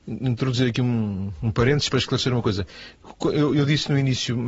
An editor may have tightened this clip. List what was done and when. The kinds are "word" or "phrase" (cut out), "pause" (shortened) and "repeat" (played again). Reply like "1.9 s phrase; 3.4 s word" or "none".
1.9 s word